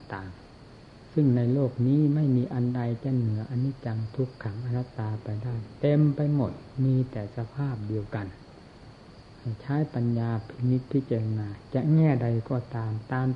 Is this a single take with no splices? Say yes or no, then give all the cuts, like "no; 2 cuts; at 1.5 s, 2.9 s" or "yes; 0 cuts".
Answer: no; 1 cut; at 1.1 s